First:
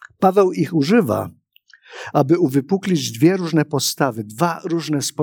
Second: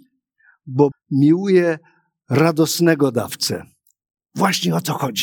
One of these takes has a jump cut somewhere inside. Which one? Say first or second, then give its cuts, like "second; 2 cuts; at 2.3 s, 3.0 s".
second; 1 cut; at 0.9 s